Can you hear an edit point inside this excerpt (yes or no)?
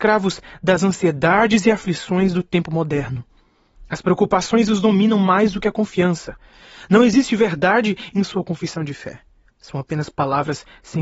no